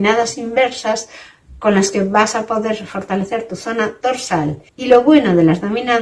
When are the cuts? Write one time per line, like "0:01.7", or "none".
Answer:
0:04.7